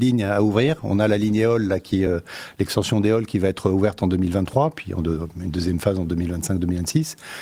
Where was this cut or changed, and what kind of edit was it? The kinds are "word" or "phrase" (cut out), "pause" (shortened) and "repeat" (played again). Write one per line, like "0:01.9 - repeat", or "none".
none

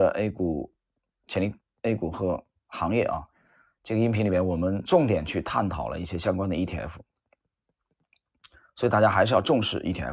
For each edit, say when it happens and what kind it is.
none

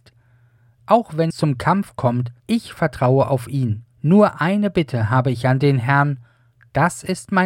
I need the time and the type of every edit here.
0:01.3 - word
0:02.4 - pause
0:03.9 - pause

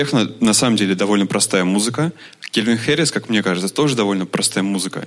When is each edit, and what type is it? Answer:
none

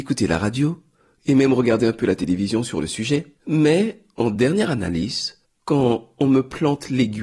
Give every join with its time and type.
0:03.4 - pause
0:05.4 - pause

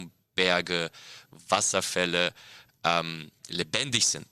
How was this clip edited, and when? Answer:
none

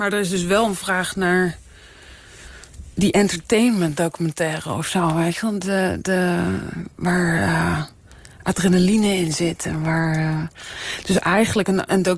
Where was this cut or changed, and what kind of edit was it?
0:02.9 - pause

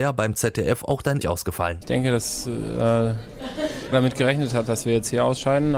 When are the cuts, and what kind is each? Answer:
0:01.2 - word
0:03.9 - word

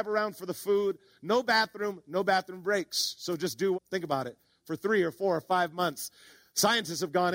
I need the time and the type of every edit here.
0:03.7 - word

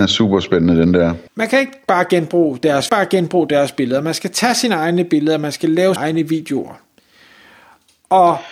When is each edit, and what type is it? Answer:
0:01.3 - pause
0:02.9 - phrase
0:06.0 - word

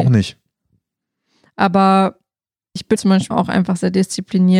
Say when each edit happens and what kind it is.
0:03.0 - word
0:03.3 - word

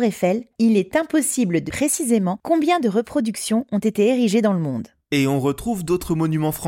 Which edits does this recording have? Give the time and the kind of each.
0:01.7 - word

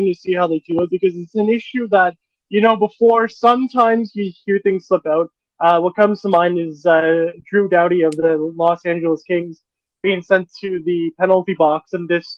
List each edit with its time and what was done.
none

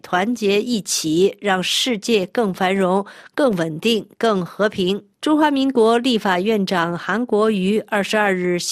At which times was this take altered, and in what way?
0:05.1 - pause

